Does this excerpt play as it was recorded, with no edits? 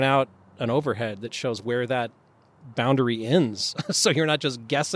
yes; 0 cuts

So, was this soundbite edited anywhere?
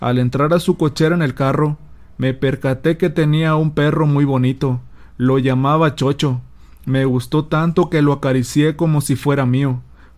no; 0 cuts

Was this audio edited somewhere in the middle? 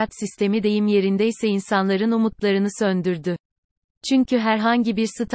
no; 0 cuts

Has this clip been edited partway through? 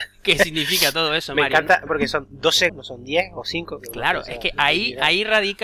yes; 2 cuts; at 1.9 s, 2.7 s

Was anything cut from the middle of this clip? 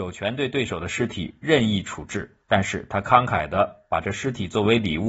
yes; 1 cut; at 2.4 s

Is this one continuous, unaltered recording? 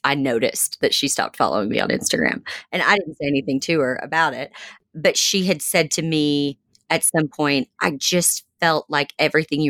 yes; 0 cuts

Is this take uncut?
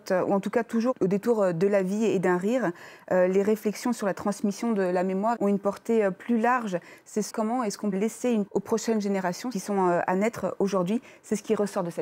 no; 5 cuts; at 5.4 s, 7.3 s, 7.9 s, 8.5 s, 9.5 s

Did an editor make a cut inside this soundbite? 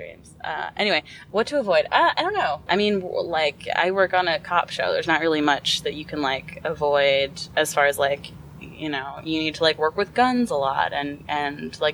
no; 0 cuts

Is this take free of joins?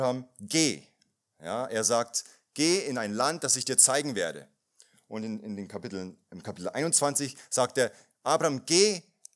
yes; 0 cuts

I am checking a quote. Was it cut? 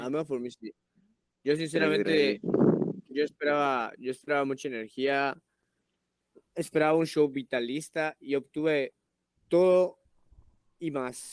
no; 0 cuts

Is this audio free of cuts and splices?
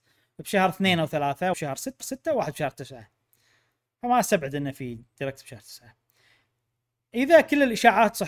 no; 2 cuts; at 1.5 s, 2.0 s

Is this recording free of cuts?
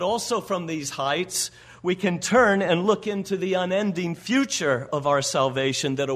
yes; 0 cuts

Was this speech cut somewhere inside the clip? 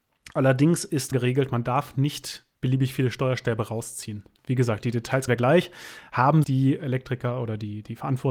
yes; 5 cuts; at 1.1 s, 2.5 s, 4.4 s, 5.3 s, 6.4 s

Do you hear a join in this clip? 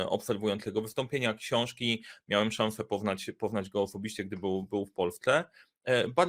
yes; 1 cut; at 4.6 s

